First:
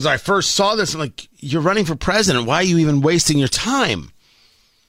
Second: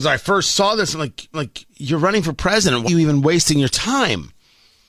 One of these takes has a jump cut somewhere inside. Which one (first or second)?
second